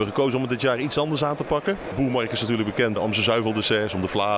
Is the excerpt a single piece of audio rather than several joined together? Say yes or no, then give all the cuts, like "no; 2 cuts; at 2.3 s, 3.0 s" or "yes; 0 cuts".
no; 1 cut; at 3.0 s